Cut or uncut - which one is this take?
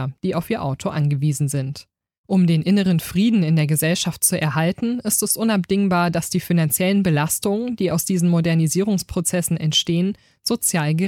uncut